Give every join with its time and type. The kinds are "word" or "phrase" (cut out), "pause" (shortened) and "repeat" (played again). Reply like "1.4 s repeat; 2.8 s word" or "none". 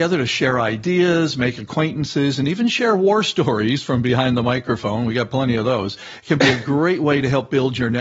none

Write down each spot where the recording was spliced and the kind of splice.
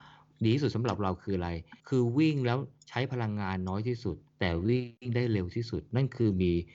1.8 s pause; 4.3 s pause; 5.0 s pause

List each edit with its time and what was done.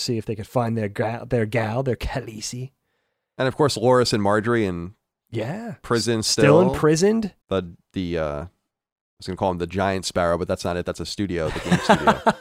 7.4 s pause

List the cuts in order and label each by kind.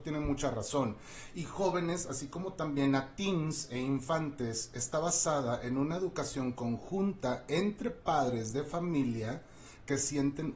none

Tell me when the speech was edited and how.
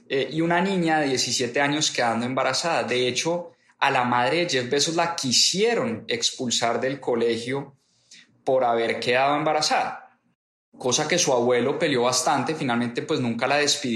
none

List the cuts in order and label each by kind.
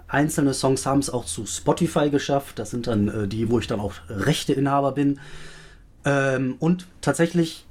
none

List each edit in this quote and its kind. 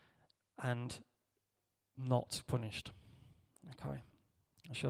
2.5 s word

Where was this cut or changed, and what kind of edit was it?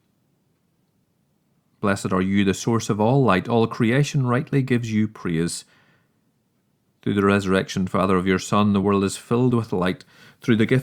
none

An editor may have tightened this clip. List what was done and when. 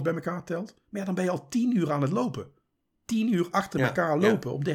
none

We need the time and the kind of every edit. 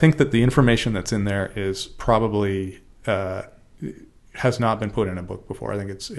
none

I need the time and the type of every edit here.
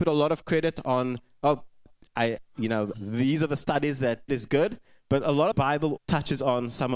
2.9 s word; 4.3 s word; 5.5 s phrase; 6.0 s word

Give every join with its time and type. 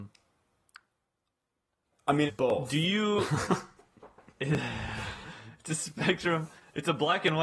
2.3 s word

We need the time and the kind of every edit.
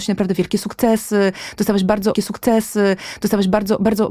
2.1 s repeat

